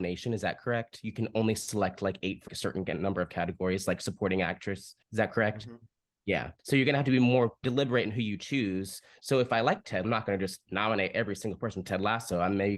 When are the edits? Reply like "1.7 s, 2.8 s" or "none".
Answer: 2.5 s, 5.0 s, 6.6 s, 7.6 s, 10.0 s